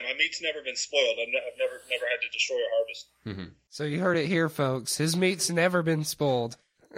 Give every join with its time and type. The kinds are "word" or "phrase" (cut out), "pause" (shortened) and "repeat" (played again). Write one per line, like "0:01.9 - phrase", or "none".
none